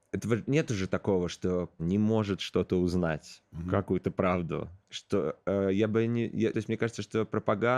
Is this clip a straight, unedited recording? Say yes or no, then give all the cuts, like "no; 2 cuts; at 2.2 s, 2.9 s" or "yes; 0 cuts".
no; 3 cuts; at 1.8 s, 4.8 s, 6.5 s